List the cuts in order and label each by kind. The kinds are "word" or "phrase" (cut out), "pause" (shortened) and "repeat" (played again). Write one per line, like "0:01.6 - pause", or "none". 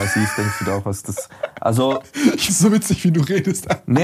0:02.5 - word